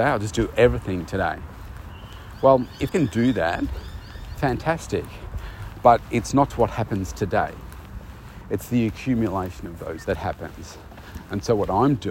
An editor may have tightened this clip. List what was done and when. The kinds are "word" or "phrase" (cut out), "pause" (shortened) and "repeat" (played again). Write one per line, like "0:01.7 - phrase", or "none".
0:02.9 - word
0:04.3 - word
0:06.5 - word
0:10.0 - word